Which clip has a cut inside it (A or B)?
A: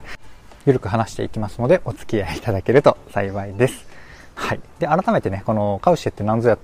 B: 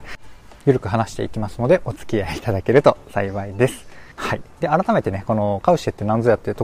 B